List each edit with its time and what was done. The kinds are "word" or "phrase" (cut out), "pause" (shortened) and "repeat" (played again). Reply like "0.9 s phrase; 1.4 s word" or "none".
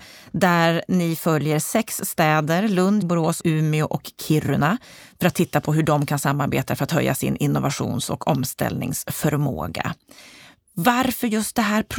3.0 s word; 3.4 s word